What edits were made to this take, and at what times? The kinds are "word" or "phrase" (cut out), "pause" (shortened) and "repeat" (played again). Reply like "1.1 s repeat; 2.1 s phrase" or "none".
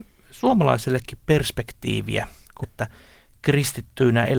2.6 s phrase